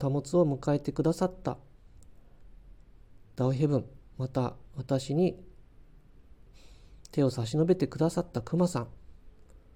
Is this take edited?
no; 0 cuts

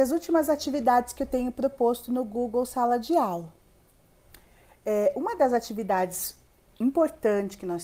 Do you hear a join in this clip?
no; 0 cuts

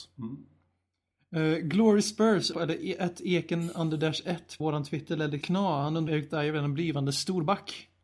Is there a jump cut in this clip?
yes; 4 cuts; at 2.5 s, 4.6 s, 5.4 s, 6.1 s

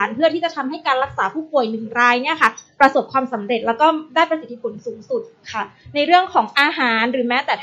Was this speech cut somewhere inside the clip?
no; 0 cuts

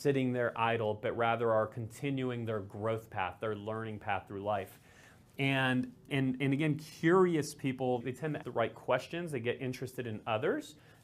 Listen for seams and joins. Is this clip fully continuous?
no; 3 cuts; at 6.1 s, 8.0 s, 8.4 s

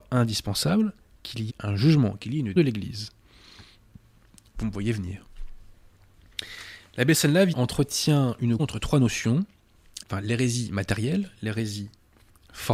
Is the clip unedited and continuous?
no; 5 cuts; at 1.5 s, 2.6 s, 7.5 s, 8.6 s, 10.0 s

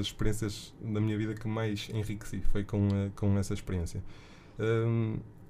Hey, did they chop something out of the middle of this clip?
no; 0 cuts

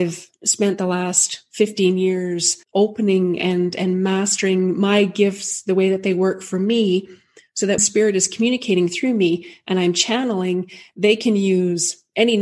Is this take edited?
yes; 2 cuts; at 2.6 s, 7.8 s

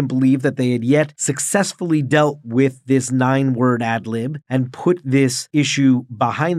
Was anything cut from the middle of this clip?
no; 0 cuts

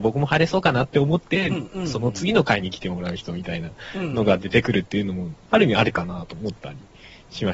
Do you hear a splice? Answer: yes; 1 cut; at 5.4 s

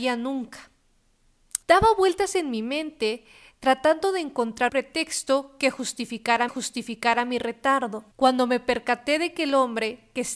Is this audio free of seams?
no; 4 cuts; at 1.6 s, 4.7 s, 6.5 s, 8.1 s

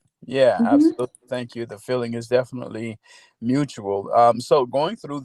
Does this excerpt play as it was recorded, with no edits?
yes; 0 cuts

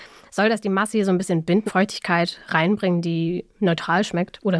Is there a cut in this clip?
yes; 1 cut; at 1.7 s

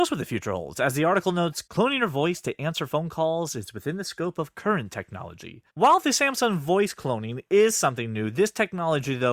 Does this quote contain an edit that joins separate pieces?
yes; 2 cuts; at 1.7 s, 5.7 s

